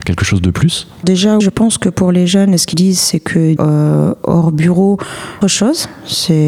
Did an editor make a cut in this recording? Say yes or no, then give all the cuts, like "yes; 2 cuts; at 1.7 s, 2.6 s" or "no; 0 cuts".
yes; 5 cuts; at 1.0 s, 1.4 s, 2.7 s, 3.6 s, 5.4 s